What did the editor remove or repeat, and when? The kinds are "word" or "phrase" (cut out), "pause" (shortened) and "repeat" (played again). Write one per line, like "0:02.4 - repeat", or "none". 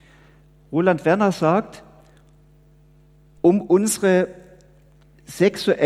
none